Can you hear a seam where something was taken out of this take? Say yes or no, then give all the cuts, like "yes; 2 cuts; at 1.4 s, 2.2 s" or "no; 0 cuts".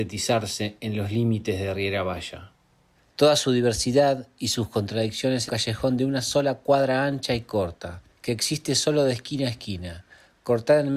yes; 2 cuts; at 5.5 s, 8.1 s